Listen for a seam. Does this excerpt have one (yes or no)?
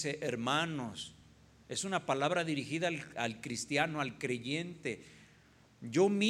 no